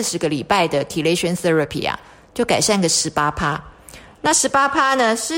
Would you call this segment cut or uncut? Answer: uncut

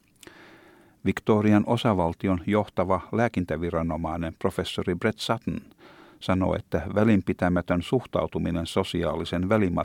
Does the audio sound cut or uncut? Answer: uncut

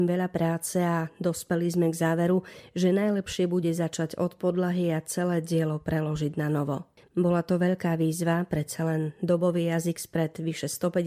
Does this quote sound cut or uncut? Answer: uncut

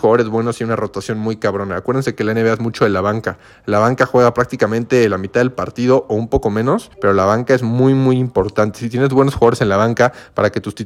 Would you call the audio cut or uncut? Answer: cut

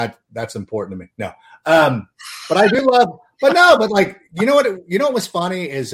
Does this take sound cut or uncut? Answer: uncut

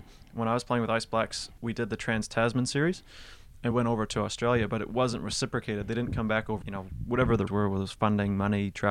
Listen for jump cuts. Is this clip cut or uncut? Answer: cut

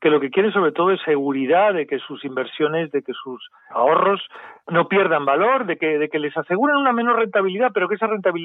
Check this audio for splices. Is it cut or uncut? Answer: uncut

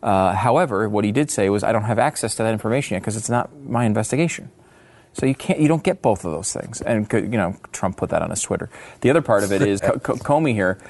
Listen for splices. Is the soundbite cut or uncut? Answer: cut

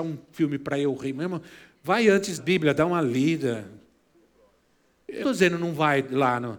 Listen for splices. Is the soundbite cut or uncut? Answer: cut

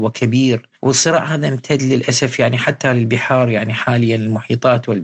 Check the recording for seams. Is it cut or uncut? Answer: uncut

